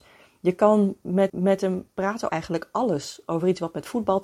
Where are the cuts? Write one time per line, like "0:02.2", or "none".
0:01.3
0:02.3

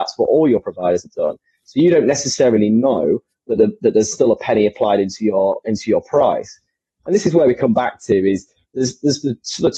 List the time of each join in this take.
none

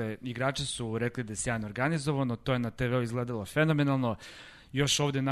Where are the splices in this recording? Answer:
none

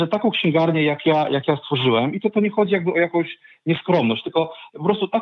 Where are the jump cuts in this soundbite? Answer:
none

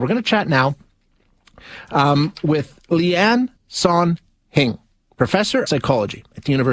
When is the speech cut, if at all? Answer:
0:03.6
0:05.7

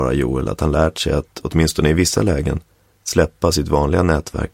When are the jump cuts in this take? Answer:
none

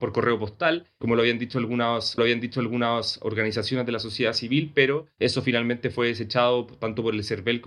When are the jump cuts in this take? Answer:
0:02.2

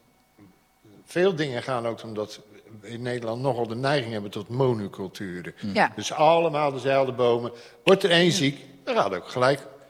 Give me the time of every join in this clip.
0:02.0

